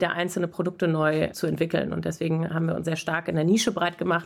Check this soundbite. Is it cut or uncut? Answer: cut